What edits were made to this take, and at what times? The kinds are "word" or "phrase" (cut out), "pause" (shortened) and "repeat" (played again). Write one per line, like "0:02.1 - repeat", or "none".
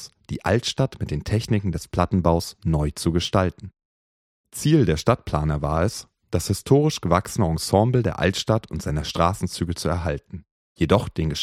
none